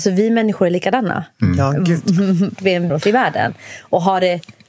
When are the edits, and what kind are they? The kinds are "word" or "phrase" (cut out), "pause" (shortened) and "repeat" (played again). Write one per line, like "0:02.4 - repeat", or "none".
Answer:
0:02.6 - word
0:02.9 - word